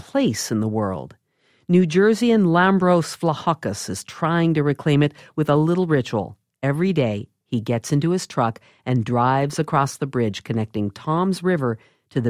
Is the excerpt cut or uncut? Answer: uncut